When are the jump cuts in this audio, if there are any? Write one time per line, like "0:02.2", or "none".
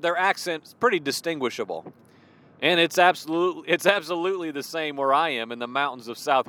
none